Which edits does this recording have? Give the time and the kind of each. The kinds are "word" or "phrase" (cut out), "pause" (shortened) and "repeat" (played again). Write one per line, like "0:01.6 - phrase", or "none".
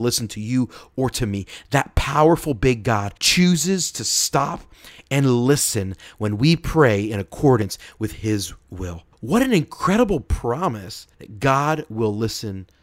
0:03.2 - pause
0:09.1 - pause
0:11.1 - pause